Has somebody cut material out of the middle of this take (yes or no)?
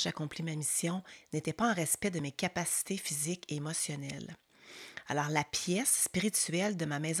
no